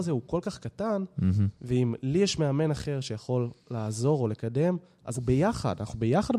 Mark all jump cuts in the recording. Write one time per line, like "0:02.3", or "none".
0:01.6
0:03.6
0:05.1